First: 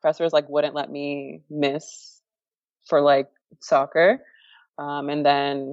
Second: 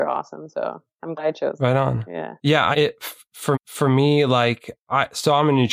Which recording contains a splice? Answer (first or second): second